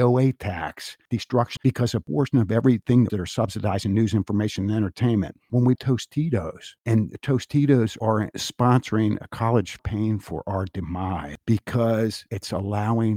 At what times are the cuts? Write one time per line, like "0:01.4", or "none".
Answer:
0:01.6
0:03.1
0:05.7
0:09.8